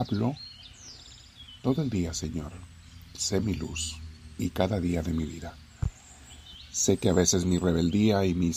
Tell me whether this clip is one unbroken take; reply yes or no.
yes